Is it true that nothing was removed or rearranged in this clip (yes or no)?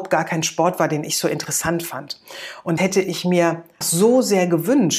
no